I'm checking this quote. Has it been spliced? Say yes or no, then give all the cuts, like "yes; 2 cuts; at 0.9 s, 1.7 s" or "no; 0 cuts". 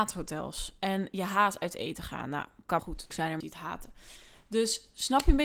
yes; 3 cuts; at 2.8 s, 3.1 s, 3.4 s